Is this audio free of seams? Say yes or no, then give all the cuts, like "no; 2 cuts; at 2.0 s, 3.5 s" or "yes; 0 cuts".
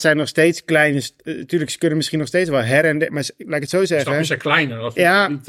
yes; 0 cuts